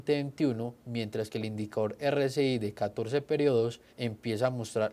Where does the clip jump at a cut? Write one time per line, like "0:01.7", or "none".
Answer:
0:03.9